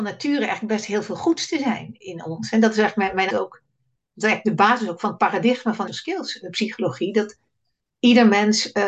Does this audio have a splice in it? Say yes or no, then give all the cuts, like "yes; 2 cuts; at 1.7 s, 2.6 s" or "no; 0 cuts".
yes; 3 cuts; at 2.0 s, 3.3 s, 5.9 s